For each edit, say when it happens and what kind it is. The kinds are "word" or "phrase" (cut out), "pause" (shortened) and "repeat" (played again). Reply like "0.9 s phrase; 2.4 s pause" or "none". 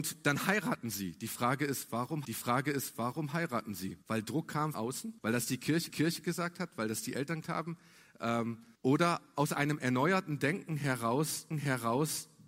2.2 s repeat; 4.0 s pause; 4.7 s word; 5.2 s pause; 5.9 s repeat; 7.4 s word; 8.8 s pause; 11.5 s repeat